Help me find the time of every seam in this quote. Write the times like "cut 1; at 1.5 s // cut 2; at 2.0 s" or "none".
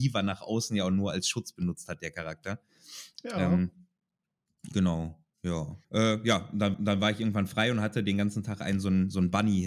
cut 1; at 5.8 s // cut 2; at 6.7 s